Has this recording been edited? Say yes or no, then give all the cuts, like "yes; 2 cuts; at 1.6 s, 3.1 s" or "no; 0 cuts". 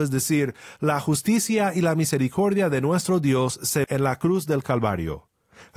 yes; 1 cut; at 3.8 s